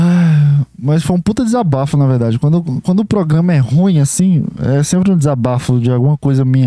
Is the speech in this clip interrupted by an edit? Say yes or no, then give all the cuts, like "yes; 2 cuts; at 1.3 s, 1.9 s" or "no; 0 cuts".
no; 0 cuts